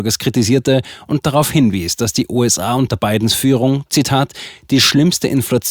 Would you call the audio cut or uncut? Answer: uncut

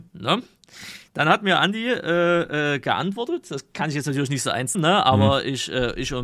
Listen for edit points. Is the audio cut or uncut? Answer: cut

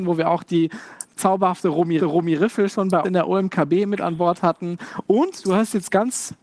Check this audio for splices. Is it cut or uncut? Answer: cut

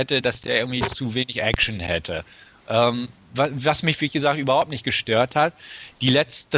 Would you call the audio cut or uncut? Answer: uncut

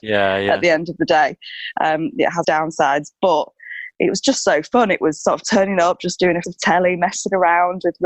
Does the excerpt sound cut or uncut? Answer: cut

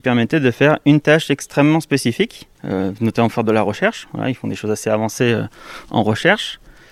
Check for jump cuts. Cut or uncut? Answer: cut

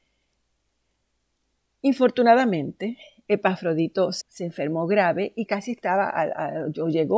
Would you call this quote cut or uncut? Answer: cut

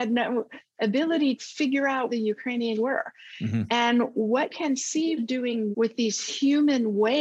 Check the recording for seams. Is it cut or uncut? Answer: cut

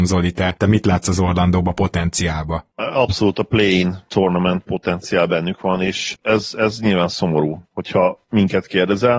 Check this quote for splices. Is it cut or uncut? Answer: cut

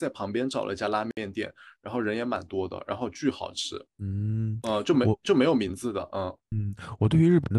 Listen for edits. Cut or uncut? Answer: cut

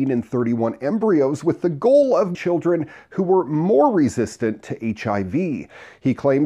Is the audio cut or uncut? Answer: cut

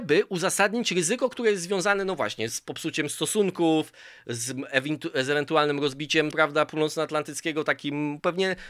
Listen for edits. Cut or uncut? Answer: cut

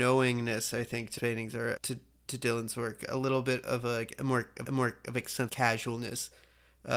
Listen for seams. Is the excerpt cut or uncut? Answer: cut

